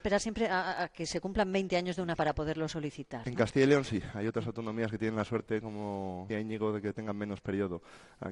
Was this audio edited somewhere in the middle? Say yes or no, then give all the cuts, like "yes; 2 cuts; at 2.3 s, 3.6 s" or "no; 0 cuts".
yes; 2 cuts; at 2.2 s, 6.3 s